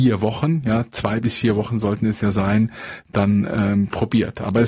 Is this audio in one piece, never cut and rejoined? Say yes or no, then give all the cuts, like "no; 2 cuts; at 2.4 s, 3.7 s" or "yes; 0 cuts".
yes; 0 cuts